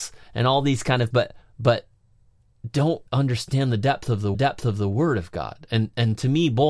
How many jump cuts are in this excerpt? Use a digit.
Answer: 4